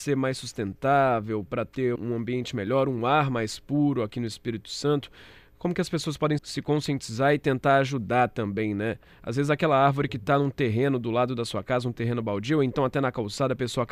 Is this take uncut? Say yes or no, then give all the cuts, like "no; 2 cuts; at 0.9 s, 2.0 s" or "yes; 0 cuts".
no; 2 cuts; at 2.0 s, 6.4 s